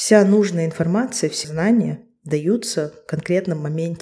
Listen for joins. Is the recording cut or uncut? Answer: cut